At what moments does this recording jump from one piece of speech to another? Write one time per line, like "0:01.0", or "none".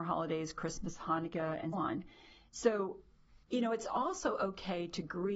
0:01.7
0:03.4